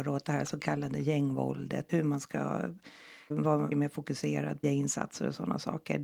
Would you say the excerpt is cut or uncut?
cut